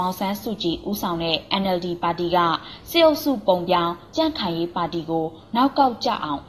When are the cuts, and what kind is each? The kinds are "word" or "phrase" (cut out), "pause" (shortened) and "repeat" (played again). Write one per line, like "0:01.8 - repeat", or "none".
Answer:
none